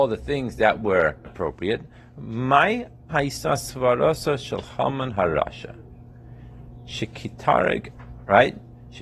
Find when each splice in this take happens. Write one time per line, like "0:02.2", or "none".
0:01.2
0:03.1